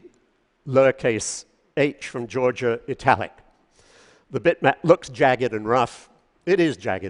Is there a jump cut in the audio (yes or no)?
no